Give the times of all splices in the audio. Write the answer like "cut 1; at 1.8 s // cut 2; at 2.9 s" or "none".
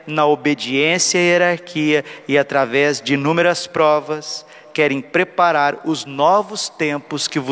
none